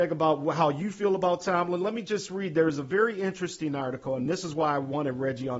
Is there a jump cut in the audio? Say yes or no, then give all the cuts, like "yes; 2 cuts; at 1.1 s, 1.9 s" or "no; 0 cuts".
no; 0 cuts